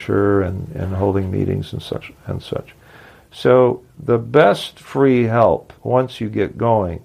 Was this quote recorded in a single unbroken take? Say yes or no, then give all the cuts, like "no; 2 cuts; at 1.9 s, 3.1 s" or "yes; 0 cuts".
no; 1 cut; at 5.8 s